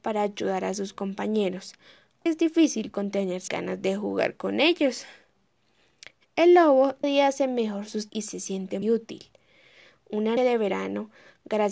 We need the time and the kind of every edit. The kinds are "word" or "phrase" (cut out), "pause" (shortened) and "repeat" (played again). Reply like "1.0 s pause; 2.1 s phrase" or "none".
2.3 s word; 3.5 s word; 7.0 s word; 8.1 s word; 8.8 s word; 10.4 s word